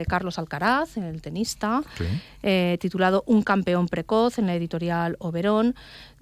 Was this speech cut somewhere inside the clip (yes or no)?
no